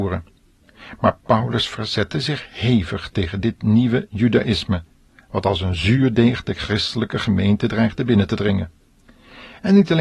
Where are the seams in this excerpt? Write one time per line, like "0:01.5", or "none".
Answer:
none